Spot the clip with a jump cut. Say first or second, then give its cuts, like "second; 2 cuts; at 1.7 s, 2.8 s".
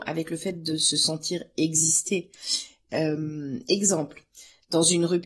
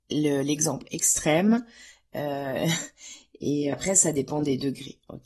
second; 1 cut; at 3.7 s